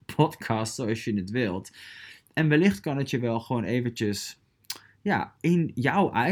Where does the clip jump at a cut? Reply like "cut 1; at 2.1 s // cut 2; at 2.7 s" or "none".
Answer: none